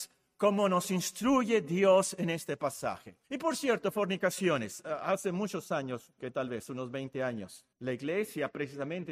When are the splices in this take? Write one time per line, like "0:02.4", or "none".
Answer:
0:03.2
0:07.7

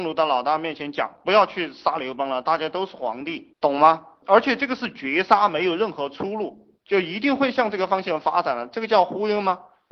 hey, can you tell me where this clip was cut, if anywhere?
none

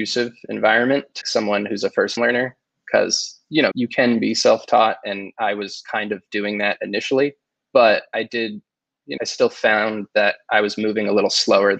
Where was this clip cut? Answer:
0:01.2
0:02.2
0:03.7
0:08.1
0:09.2

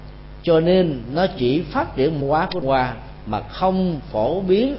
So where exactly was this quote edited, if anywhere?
0:02.2
0:02.6

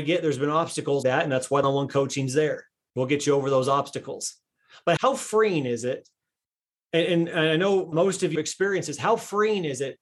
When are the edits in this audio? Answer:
0:01.0
0:01.6
0:05.0
0:07.9
0:08.3

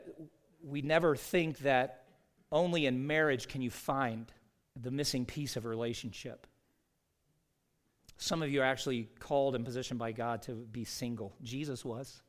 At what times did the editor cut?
0:04.6

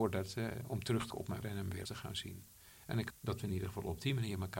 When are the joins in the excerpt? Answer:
0:01.1
0:01.4
0:01.9
0:03.1

